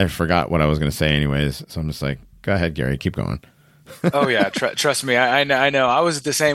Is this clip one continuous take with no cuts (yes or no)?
yes